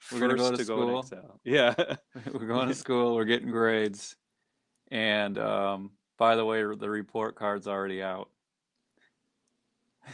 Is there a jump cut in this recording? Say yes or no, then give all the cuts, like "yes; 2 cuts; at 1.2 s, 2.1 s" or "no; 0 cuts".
no; 0 cuts